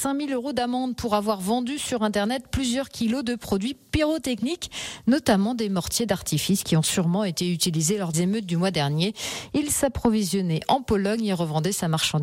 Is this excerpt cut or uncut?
cut